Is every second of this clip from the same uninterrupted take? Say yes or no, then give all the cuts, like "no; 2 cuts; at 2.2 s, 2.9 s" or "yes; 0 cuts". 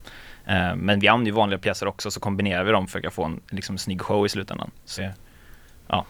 no; 2 cuts; at 3.4 s, 5.0 s